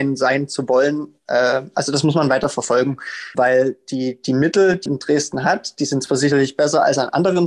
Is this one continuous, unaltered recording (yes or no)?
no